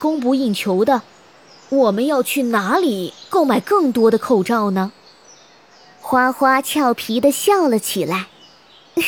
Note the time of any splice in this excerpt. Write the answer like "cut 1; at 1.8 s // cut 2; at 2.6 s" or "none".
none